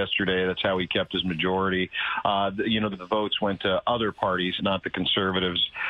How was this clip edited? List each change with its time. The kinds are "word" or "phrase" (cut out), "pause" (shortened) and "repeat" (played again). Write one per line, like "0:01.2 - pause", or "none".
0:02.9 - word
0:04.6 - word